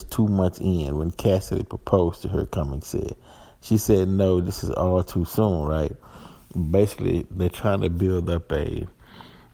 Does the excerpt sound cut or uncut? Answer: uncut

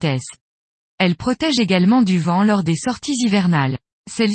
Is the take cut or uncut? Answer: uncut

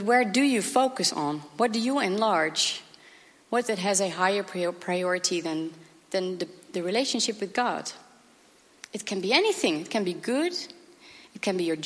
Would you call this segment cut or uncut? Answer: cut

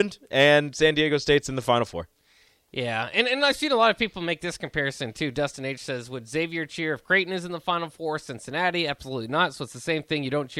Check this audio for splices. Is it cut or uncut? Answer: uncut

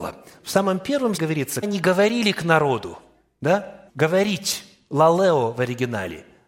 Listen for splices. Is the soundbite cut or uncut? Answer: cut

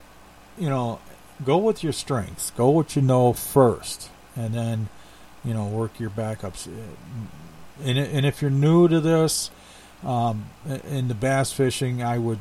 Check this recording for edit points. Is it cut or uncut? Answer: cut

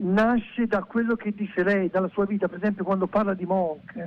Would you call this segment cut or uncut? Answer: uncut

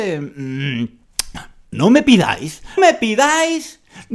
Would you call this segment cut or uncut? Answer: cut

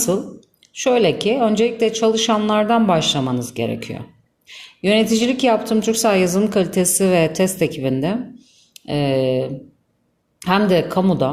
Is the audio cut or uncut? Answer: uncut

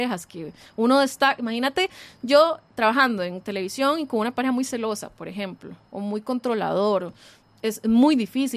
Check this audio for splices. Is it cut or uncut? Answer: uncut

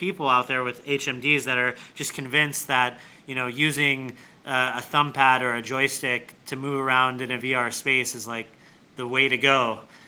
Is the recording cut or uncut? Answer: uncut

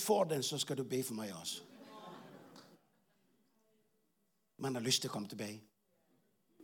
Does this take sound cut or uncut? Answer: uncut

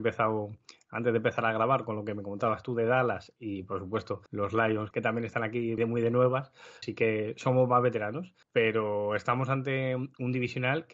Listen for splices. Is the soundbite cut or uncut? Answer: cut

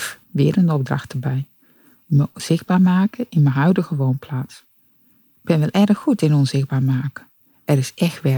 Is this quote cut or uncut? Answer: uncut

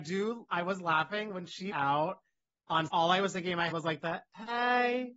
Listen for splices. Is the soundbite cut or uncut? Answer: cut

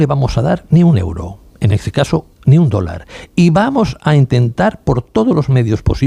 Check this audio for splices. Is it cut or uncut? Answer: uncut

